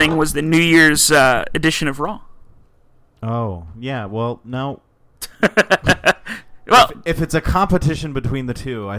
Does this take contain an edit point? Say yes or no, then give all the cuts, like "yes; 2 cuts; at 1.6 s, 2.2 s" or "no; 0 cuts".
no; 0 cuts